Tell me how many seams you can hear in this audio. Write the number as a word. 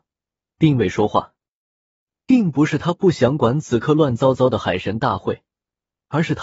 zero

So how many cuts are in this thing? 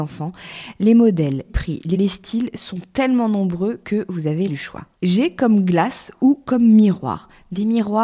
four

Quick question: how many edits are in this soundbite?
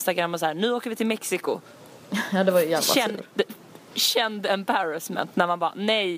one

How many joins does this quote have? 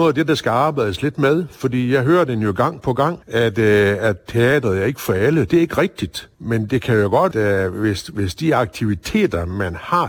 three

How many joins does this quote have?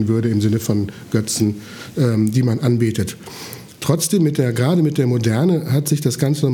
zero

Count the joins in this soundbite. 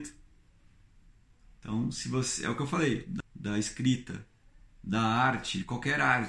one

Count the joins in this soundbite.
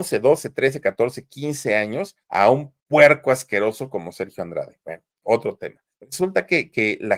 three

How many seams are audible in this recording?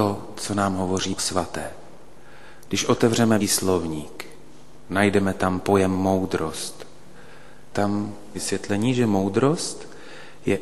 four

